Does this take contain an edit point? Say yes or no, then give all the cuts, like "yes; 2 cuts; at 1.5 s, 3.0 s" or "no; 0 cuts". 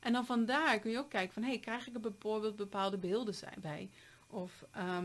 no; 0 cuts